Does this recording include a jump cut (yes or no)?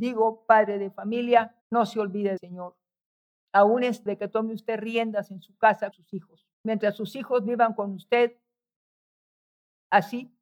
yes